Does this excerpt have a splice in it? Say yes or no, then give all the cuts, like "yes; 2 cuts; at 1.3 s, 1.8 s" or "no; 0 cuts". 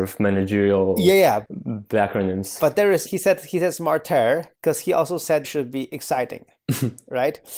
yes; 3 cuts; at 3.1 s, 4.5 s, 5.4 s